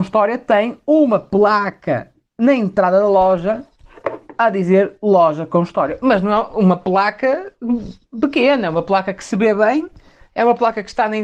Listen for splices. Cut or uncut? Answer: uncut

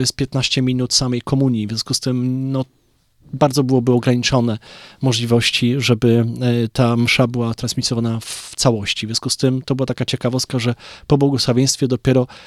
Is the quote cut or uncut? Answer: uncut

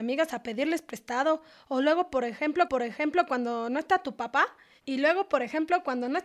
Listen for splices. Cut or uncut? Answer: cut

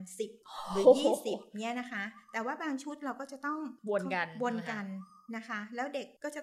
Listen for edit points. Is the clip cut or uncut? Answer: uncut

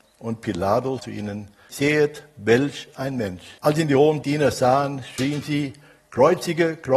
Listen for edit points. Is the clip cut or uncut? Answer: cut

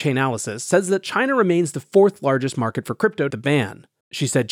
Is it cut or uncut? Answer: cut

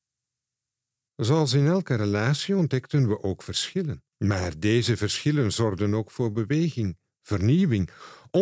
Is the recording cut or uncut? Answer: cut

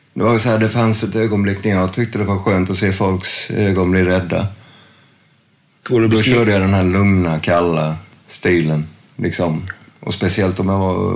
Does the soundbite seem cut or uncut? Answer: uncut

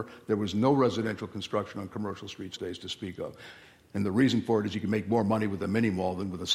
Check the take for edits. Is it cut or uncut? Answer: cut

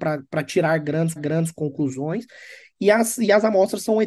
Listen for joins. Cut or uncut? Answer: cut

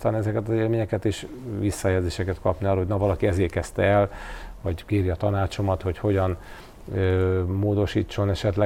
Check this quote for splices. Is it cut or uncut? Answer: uncut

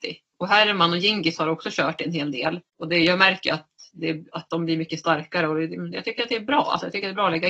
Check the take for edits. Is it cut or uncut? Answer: cut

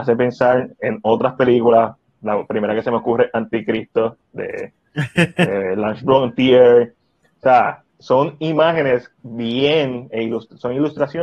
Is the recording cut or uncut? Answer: cut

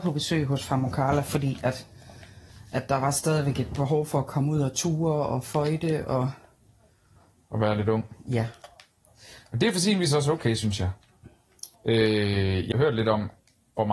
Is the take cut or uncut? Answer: cut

